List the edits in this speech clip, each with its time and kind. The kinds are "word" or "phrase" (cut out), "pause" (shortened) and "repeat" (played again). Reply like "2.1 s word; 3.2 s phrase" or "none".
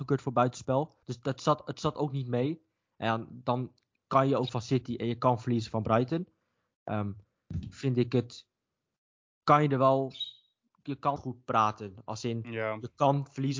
1.0 s pause; 4.5 s word; 11.2 s phrase